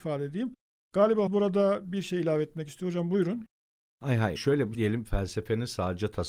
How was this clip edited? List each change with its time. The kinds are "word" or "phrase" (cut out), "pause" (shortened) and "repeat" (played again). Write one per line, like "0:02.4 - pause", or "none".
0:01.3 - word
0:04.4 - word
0:04.7 - word

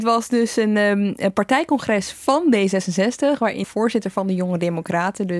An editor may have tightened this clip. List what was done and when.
0:03.6 - word

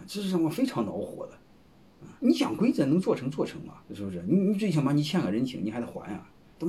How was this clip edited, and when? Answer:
0:02.2 - pause
0:03.8 - pause

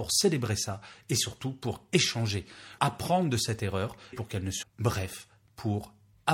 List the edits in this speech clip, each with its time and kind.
0:02.8 - word
0:04.1 - word
0:04.6 - phrase

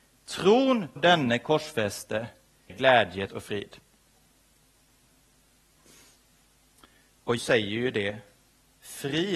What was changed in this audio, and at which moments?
0:01.0 - word
0:02.7 - word
0:03.3 - word
0:07.4 - word

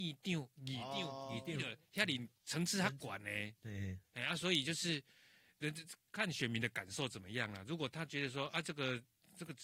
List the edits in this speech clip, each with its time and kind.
0:02.4 - pause
0:06.1 - pause

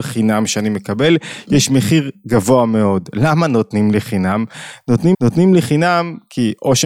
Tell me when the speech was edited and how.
0:05.1 - repeat

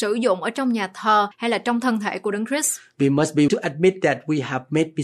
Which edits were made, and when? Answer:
0:01.3 - pause
0:03.5 - word

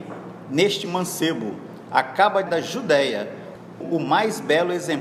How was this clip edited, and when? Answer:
0:02.5 - word
0:03.8 - word

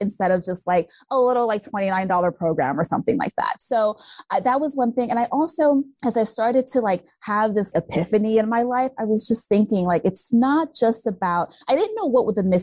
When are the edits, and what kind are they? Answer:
0:07.7 - word

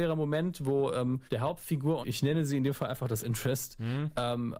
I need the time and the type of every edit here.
0:01.3 - pause
0:02.0 - word
0:03.2 - word

